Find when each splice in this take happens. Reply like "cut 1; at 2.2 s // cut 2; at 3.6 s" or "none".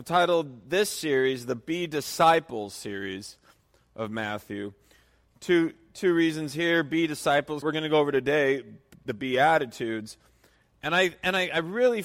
cut 1; at 7.6 s